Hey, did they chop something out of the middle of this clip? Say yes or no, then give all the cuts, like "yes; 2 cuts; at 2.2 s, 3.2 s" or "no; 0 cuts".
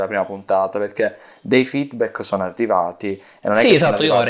no; 0 cuts